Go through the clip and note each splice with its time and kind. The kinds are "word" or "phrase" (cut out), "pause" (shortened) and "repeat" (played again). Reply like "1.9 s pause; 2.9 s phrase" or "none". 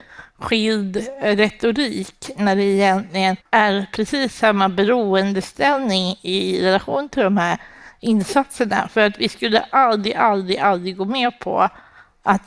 3.4 s pause